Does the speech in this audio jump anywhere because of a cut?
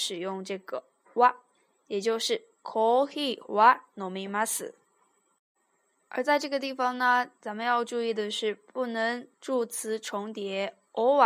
yes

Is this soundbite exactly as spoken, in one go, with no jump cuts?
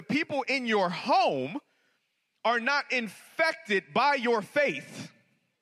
yes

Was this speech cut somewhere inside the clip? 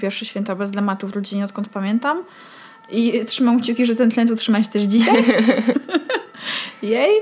no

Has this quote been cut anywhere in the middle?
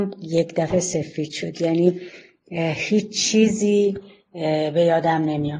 no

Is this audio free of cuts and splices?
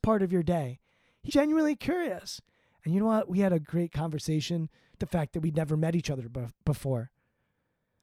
no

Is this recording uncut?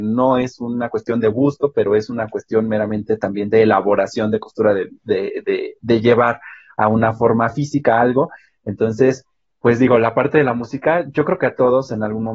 yes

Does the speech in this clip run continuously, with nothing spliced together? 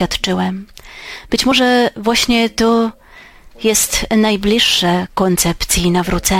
yes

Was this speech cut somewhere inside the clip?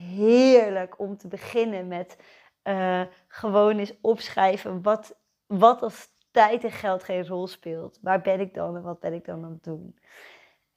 no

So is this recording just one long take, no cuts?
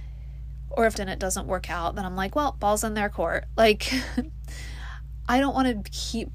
no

